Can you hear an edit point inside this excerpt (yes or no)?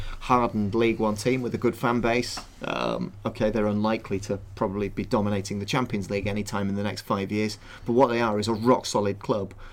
no